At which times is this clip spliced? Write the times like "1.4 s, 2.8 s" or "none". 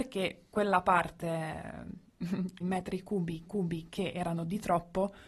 2.6 s, 3.5 s